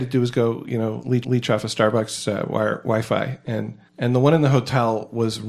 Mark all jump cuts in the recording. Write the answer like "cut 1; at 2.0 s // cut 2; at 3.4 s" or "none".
cut 1; at 1.2 s // cut 2; at 3.9 s